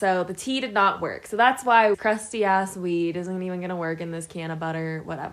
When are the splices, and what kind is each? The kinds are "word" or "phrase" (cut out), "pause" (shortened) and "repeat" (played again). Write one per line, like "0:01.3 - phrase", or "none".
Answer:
0:01.9 - phrase